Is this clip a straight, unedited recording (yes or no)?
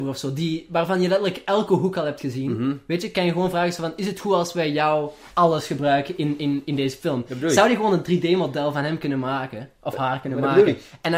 yes